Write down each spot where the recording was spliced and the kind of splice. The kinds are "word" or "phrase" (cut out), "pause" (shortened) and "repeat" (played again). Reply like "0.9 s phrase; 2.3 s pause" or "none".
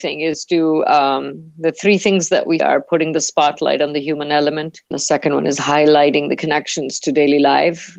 2.6 s word; 4.9 s pause